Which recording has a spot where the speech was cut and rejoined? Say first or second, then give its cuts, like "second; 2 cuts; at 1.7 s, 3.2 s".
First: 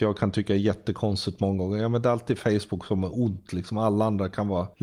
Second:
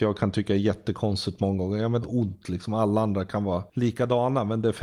second; 1 cut; at 2.0 s